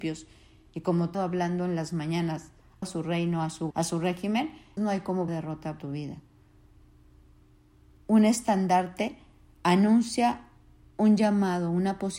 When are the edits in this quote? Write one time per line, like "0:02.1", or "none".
0:01.1
0:02.8
0:03.7
0:04.8
0:05.3
0:05.8